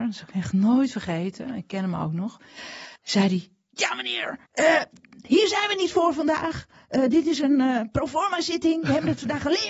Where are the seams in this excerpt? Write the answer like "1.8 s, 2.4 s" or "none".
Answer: 3.0 s, 4.5 s